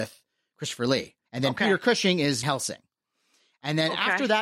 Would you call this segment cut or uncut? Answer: cut